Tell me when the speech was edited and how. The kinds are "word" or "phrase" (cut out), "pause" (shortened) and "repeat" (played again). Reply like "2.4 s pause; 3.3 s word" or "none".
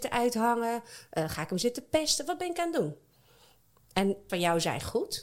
4.3 s phrase